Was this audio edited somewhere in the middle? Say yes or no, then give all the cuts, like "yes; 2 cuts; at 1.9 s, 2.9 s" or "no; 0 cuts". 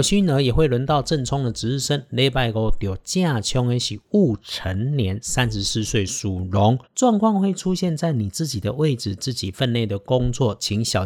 yes; 1 cut; at 6.8 s